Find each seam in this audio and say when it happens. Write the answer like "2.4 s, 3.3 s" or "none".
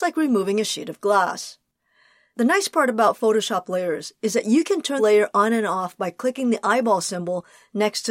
5.0 s